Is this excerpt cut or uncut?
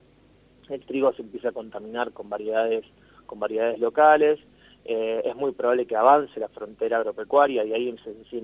uncut